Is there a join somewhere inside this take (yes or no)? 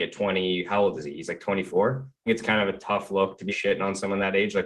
yes